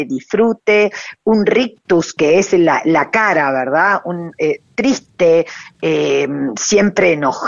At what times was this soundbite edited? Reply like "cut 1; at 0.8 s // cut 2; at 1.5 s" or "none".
none